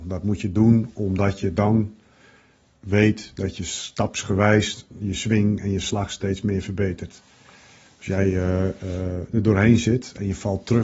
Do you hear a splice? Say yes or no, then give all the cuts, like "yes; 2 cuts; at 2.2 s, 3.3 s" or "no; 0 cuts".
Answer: no; 0 cuts